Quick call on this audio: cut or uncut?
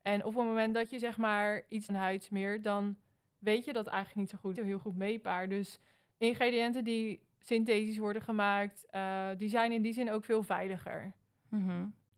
cut